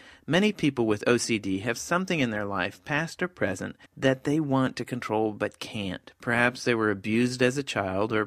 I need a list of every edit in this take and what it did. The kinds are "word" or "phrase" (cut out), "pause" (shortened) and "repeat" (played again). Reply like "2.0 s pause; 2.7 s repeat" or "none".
3.9 s pause